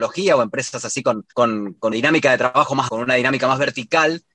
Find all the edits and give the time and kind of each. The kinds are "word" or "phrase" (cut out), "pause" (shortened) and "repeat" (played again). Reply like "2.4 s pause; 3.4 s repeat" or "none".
1.3 s pause; 1.9 s word; 2.9 s phrase

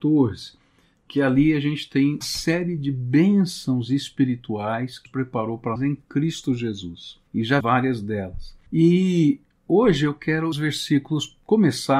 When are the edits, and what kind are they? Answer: 2.2 s word; 5.1 s word; 5.8 s word; 7.3 s pause; 7.6 s word; 8.7 s pause; 10.5 s phrase

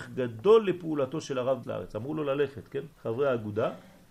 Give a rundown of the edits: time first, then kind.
1.6 s word; 2.9 s pause

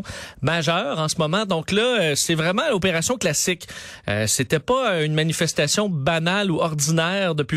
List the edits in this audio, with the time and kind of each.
none

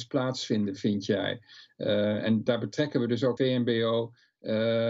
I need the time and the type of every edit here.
2.5 s word; 3.4 s word

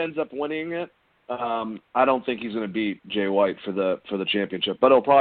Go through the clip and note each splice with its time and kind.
none

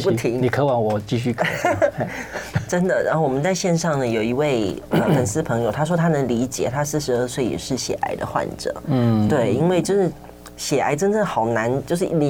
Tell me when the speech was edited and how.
none

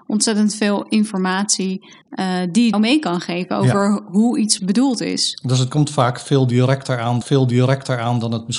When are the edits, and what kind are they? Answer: 2.0 s pause; 2.7 s phrase; 4.6 s word; 7.2 s repeat

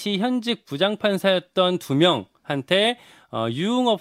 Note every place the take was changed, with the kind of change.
none

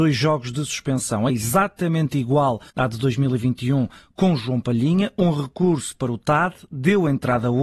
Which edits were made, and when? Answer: 1.3 s word; 2.7 s pause

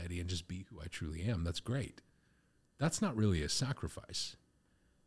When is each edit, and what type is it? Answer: none

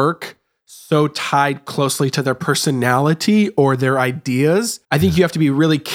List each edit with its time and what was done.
4.8 s pause

